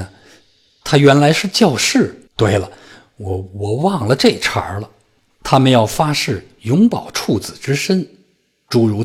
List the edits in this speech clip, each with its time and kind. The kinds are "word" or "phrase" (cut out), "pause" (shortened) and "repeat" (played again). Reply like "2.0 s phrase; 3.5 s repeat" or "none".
2.3 s pause